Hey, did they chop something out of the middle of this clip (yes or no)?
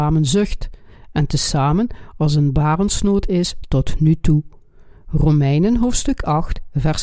no